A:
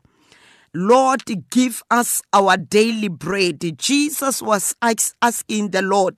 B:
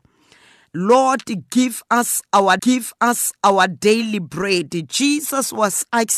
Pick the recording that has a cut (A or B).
B